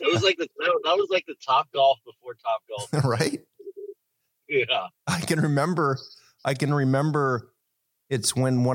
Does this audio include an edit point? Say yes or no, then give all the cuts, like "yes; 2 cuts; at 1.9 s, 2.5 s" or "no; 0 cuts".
no; 0 cuts